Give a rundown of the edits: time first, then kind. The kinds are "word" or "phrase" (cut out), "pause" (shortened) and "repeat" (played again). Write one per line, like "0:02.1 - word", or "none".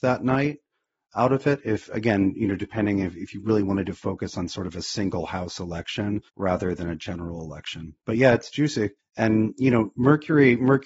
0:06.3 - pause
0:09.0 - pause